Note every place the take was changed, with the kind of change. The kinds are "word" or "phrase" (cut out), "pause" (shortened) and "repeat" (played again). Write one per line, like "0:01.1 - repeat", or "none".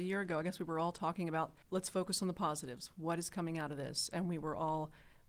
0:01.6 - pause